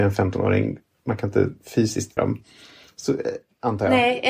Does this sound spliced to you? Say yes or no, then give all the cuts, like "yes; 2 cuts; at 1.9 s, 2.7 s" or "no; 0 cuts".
yes; 1 cut; at 2.2 s